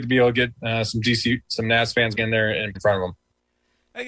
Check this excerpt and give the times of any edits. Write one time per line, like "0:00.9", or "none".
0:02.1
0:02.7